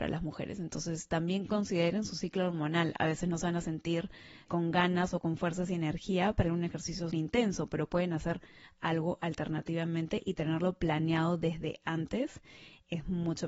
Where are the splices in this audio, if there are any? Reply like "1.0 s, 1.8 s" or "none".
4.5 s, 6.4 s, 7.1 s